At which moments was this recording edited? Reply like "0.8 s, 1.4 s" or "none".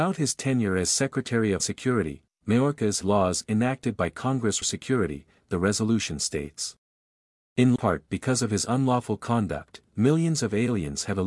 1.6 s, 3.0 s, 4.6 s, 7.8 s

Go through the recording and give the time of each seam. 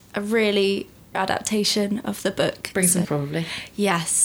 1.1 s, 3.0 s

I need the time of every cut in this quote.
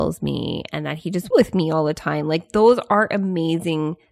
1.3 s

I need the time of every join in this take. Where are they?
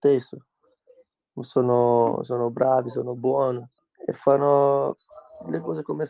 3.8 s

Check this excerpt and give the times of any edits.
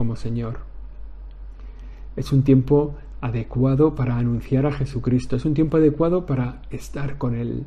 none

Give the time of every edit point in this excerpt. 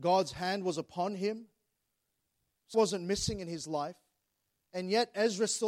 2.7 s

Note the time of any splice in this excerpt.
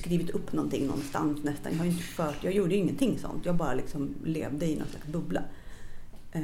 none

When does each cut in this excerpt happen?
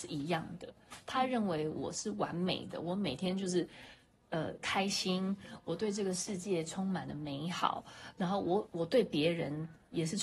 none

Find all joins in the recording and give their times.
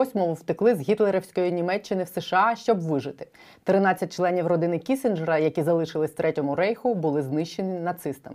none

